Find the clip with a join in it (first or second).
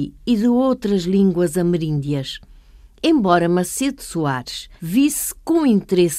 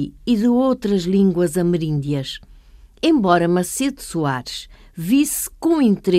first